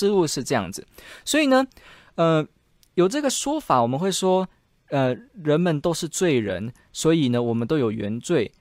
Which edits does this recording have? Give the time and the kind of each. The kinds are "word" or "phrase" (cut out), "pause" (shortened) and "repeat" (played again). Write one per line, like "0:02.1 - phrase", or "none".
none